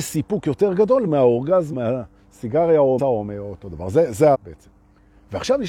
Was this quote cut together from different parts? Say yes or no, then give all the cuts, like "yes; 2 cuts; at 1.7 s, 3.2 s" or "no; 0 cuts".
yes; 4 cuts; at 1.1 s, 1.7 s, 3.0 s, 4.3 s